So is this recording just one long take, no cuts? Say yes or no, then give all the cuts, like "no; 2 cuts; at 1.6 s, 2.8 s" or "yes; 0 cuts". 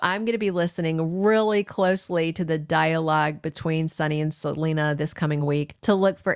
yes; 0 cuts